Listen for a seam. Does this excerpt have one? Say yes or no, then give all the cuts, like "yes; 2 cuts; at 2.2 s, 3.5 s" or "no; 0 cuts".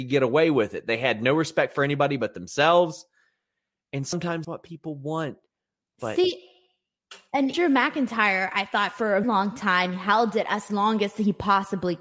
yes; 3 cuts; at 4.4 s, 7.5 s, 9.2 s